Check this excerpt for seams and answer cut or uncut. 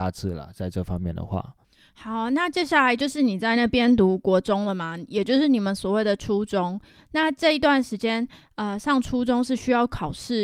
uncut